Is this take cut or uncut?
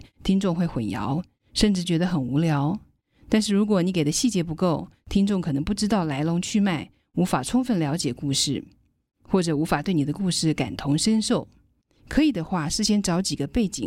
uncut